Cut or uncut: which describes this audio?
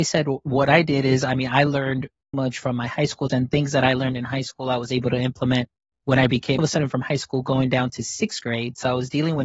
cut